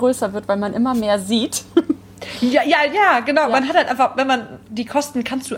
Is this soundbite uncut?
no; 1 cut; at 4.6 s

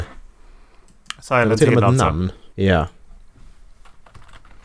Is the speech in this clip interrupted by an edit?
yes; 1 cut; at 2.5 s

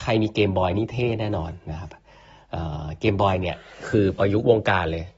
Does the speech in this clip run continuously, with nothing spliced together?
yes; 0 cuts

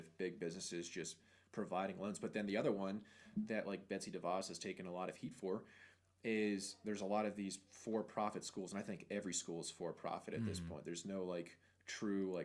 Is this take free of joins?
yes; 0 cuts

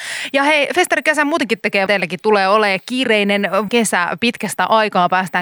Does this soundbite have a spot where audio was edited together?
yes; 2 cuts; at 1.9 s, 3.7 s

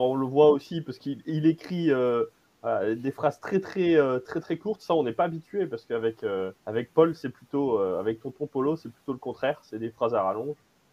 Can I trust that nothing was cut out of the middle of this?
no; 1 cut; at 6.6 s

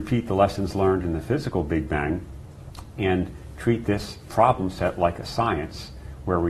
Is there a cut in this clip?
no; 0 cuts

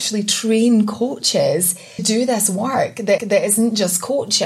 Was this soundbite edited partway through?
yes; 2 cuts; at 2.0 s, 3.2 s

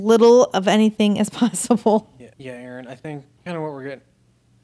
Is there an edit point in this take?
yes; 2 cuts; at 2.3 s, 3.4 s

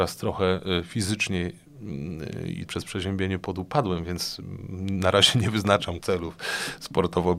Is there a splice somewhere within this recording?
yes; 2 cuts; at 2.7 s, 6.0 s

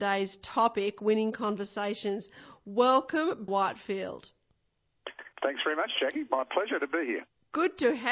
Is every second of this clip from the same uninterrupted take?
no; 2 cuts; at 3.5 s, 5.3 s

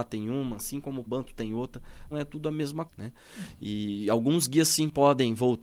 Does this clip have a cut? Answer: yes; 3 cuts; at 1.1 s, 2.1 s, 2.9 s

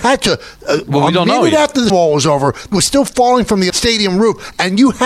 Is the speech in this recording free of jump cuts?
no; 3 cuts; at 1.9 s, 2.7 s, 3.7 s

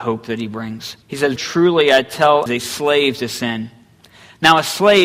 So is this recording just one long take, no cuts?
no; 3 cuts; at 1.0 s, 1.4 s, 2.5 s

